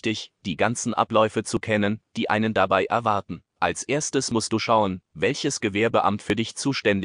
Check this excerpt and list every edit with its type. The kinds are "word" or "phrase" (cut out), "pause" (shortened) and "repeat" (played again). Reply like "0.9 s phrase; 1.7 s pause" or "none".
3.5 s pause